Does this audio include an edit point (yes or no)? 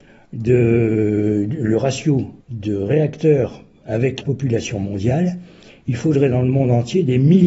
yes